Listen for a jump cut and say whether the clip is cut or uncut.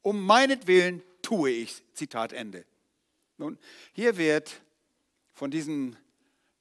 uncut